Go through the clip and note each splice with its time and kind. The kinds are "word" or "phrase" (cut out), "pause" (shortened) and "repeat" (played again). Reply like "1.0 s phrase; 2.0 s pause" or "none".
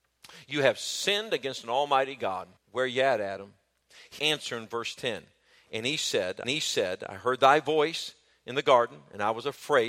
2.6 s pause; 4.2 s phrase; 6.4 s repeat